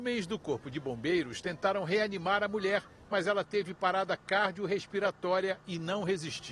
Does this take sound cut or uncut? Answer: uncut